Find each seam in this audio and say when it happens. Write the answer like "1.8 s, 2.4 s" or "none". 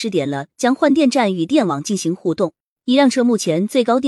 none